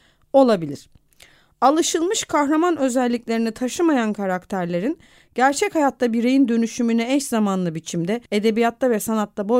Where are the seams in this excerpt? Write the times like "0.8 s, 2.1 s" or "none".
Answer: 8.3 s